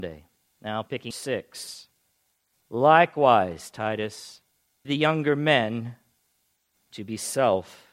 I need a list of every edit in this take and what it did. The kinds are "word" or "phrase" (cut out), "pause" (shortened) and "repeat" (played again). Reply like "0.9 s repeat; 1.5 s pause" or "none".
1.1 s phrase; 4.8 s word